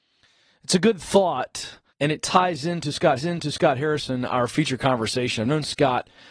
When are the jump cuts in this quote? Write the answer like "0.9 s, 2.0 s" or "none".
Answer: 1.9 s, 3.2 s

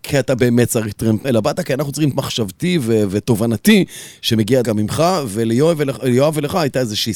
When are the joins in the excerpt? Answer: 1.2 s, 2.1 s, 4.6 s

